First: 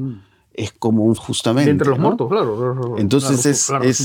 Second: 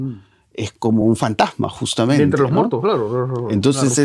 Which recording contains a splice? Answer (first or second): first